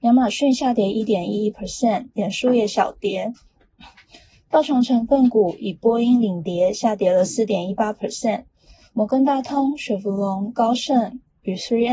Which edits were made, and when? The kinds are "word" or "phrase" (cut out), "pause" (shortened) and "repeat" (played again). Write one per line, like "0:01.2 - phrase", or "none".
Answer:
none